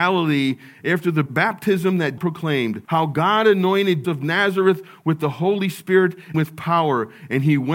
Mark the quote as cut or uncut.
cut